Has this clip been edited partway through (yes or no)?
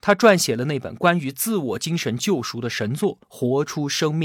yes